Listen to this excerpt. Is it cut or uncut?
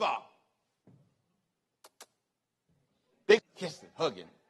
cut